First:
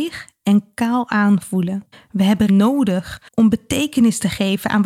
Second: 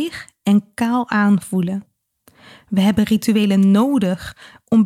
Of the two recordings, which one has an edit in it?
first; 3 cuts; at 1.9 s, 2.5 s, 3.3 s

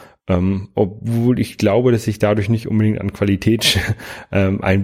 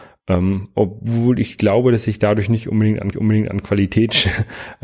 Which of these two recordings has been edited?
second; 1 cut; at 3.1 s

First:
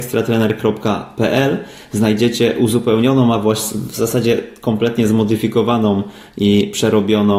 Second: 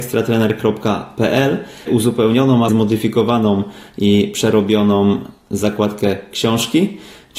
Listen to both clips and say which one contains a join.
second; 2 cuts; at 1.9 s, 2.7 s

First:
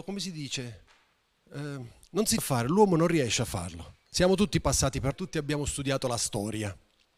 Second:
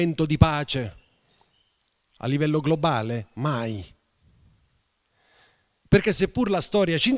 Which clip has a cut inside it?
first; 4 cuts; at 2.0 s, 2.4 s, 4.1 s, 5.1 s

